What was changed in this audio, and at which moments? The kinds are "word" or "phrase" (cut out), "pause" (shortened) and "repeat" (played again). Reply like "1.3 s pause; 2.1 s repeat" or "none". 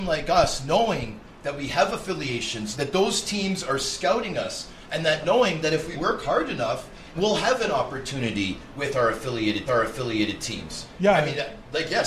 2.7 s word; 5.9 s word; 7.1 s phrase; 9.7 s repeat